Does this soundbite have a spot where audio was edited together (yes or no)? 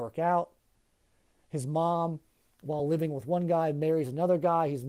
no